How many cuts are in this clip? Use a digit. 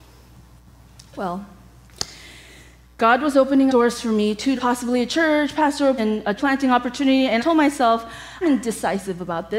6